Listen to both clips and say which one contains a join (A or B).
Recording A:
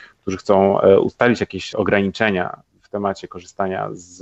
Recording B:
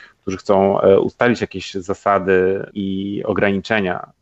A